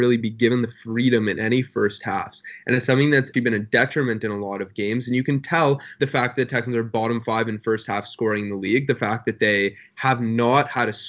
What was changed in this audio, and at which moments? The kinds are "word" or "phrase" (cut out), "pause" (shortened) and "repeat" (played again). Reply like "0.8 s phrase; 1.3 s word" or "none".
3.3 s word; 6.0 s phrase